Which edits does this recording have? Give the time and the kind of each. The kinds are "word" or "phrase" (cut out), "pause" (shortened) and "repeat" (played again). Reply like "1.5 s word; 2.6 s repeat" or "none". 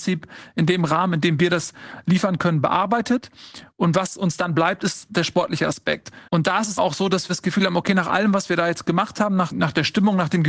3.7 s pause; 6.3 s pause; 6.8 s word; 7.3 s word; 9.5 s word